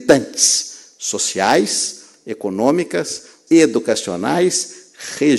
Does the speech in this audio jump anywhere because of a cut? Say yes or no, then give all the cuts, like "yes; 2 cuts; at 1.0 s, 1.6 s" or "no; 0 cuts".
yes; 1 cut; at 3.5 s